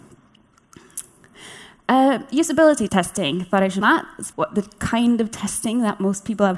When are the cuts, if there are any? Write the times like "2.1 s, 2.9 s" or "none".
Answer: 2.9 s, 3.8 s, 4.3 s